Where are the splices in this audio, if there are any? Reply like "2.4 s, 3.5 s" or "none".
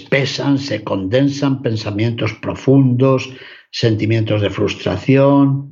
none